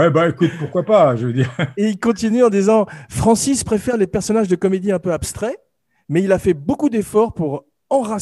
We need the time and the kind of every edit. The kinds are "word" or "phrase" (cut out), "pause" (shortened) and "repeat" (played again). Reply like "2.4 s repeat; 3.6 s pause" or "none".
none